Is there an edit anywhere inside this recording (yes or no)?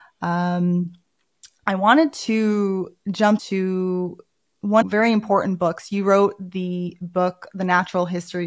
yes